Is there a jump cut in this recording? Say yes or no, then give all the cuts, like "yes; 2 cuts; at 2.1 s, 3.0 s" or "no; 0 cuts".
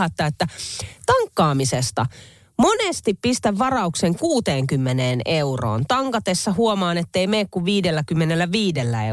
no; 0 cuts